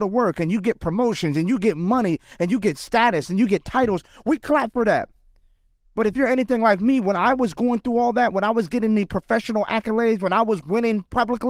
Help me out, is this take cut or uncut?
uncut